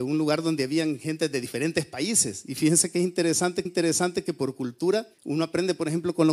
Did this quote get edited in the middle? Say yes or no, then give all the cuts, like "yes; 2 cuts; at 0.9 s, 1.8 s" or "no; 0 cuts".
yes; 2 cuts; at 3.7 s, 5.1 s